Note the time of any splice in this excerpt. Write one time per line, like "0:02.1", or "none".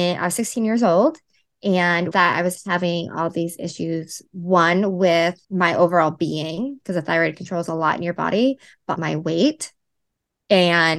0:02.1
0:05.4
0:07.3
0:09.0